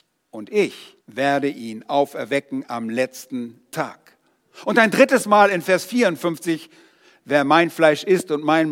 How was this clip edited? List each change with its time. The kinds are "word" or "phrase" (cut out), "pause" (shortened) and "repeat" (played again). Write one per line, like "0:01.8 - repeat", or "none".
0:01.0 - pause

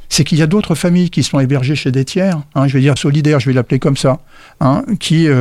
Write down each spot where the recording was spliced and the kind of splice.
0:03.0 - phrase

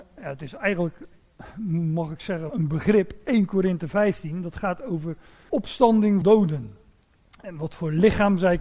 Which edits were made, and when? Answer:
0:02.5 - word
0:05.5 - word
0:06.2 - word

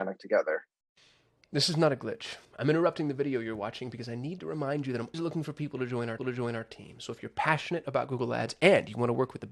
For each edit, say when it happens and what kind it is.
0:02.4 - pause
0:05.1 - word
0:06.2 - repeat

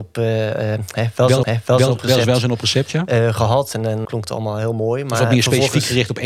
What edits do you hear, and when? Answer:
0:01.4 - repeat
0:04.0 - word

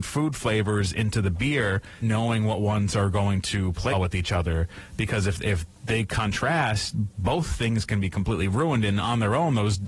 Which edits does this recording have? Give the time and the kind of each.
0:02.0 - word
0:03.9 - word

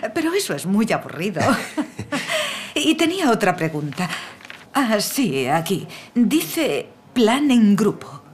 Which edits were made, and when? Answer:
0:04.7 - pause
0:06.1 - pause

